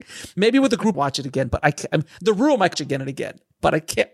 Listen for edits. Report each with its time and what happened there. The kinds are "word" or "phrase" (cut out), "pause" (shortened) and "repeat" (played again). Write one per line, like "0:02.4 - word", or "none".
0:00.9 - phrase
0:02.7 - word